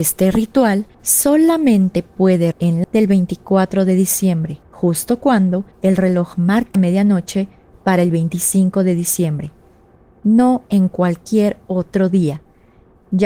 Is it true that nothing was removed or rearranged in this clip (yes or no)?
no